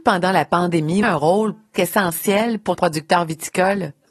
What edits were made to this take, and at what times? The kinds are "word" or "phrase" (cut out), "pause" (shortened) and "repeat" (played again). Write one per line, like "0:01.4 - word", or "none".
0:01.0 - phrase
0:01.7 - word
0:02.7 - word